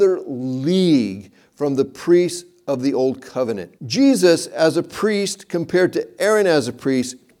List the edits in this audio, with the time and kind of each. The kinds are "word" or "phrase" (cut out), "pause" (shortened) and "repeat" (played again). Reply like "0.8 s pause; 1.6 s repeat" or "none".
3.8 s pause